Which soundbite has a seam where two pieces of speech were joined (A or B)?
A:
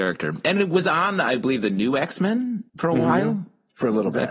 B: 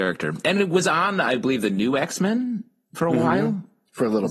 A